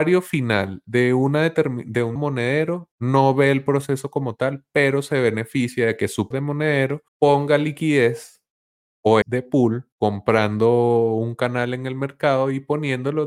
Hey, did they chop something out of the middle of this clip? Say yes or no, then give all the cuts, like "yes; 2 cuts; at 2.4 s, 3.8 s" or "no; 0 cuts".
yes; 6 cuts; at 2.2 s, 2.9 s, 6.3 s, 7.1 s, 9.2 s, 9.9 s